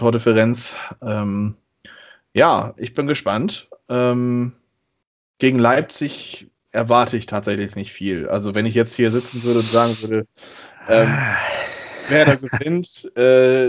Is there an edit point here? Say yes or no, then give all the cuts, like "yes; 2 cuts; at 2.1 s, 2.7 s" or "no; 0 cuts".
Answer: no; 0 cuts